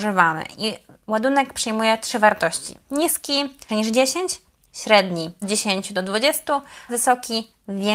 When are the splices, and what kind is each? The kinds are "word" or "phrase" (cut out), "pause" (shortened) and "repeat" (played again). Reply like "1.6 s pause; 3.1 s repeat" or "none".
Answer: 3.7 s word; 5.4 s word; 6.9 s word